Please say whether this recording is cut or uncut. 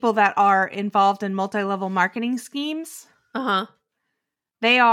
uncut